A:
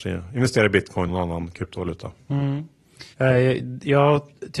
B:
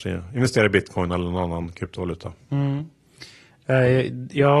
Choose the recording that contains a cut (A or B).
A